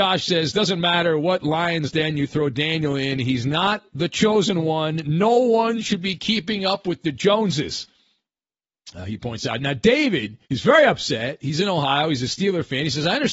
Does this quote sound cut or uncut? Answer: cut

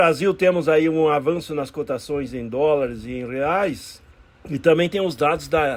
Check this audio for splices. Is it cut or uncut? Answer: cut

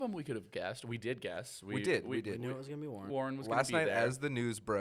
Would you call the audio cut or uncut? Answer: cut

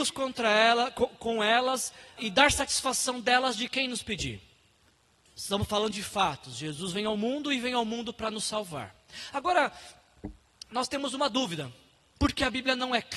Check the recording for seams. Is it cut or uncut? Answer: cut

